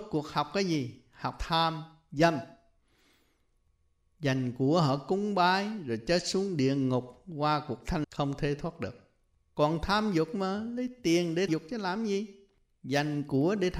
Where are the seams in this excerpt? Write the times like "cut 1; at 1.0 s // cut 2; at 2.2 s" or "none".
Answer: cut 1; at 8.0 s // cut 2; at 11.5 s